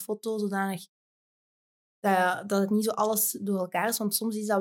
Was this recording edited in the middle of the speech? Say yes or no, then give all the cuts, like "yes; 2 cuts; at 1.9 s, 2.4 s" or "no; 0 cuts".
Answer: no; 0 cuts